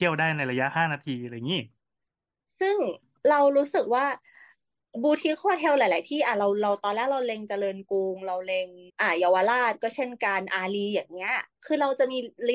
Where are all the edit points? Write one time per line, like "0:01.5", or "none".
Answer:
0:08.9